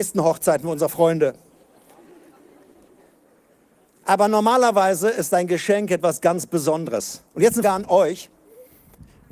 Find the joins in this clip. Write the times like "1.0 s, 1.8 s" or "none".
7.6 s